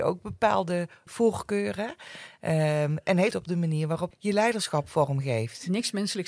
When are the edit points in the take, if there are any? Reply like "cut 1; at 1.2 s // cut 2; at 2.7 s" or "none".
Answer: cut 1; at 1.1 s // cut 2; at 3.3 s // cut 3; at 4.1 s